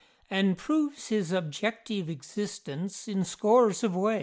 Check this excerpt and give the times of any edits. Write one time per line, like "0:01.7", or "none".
none